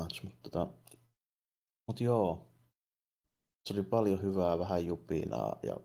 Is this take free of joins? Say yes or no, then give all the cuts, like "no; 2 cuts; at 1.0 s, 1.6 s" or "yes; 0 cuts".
yes; 0 cuts